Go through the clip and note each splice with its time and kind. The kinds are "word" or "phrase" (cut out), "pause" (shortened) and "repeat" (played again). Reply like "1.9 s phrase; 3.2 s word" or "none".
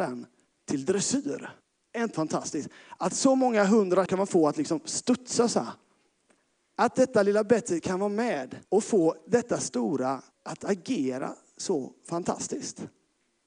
1.6 s pause; 2.1 s word; 4.1 s word; 6.4 s pause; 8.6 s pause; 10.3 s pause